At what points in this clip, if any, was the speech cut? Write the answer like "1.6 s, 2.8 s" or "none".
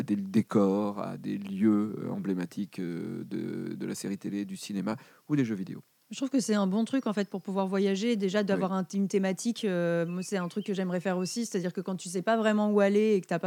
none